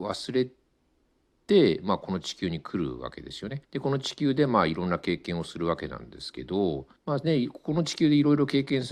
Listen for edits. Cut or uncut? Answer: cut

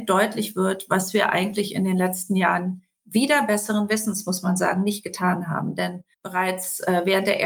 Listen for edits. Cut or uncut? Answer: cut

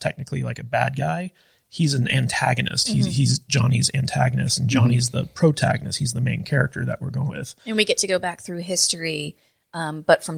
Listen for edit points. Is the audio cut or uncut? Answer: cut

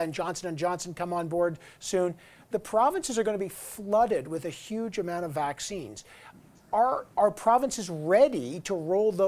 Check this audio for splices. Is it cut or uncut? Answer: uncut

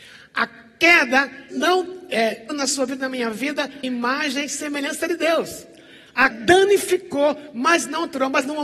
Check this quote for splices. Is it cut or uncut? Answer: cut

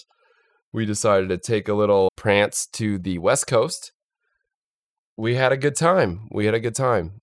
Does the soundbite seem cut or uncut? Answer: cut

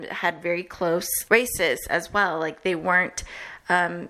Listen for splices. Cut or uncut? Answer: cut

